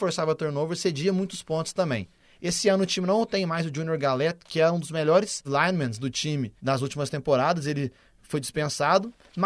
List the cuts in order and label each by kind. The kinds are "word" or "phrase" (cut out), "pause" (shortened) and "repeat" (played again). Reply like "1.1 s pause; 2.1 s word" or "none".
5.4 s word; 6.6 s pause